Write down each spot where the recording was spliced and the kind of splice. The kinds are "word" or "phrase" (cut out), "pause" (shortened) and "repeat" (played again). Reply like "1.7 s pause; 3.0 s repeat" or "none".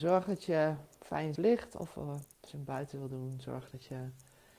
1.4 s phrase; 2.3 s pause